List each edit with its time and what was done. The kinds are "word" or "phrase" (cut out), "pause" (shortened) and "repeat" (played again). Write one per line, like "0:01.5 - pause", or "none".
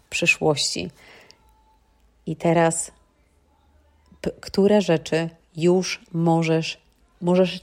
none